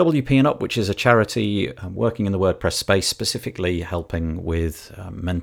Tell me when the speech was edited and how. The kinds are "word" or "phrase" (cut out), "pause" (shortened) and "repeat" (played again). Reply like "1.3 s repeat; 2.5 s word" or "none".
none